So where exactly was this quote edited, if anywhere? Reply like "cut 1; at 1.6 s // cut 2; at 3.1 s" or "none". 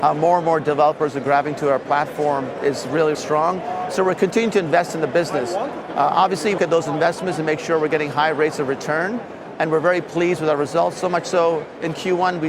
cut 1; at 3.1 s // cut 2; at 6.6 s